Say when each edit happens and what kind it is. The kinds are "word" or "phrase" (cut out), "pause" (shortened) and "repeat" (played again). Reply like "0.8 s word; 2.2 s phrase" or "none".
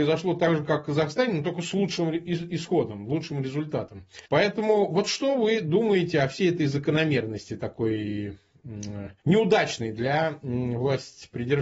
4.3 s pause; 9.2 s pause